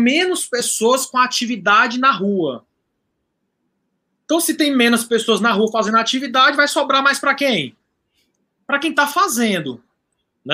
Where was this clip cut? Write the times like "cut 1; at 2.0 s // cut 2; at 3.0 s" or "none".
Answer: none